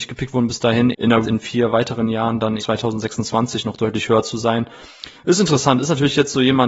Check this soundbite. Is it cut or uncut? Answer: cut